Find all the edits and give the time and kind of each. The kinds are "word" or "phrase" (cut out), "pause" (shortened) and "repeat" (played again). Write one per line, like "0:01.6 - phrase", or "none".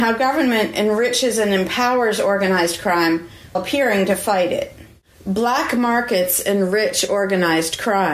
0:03.5 - word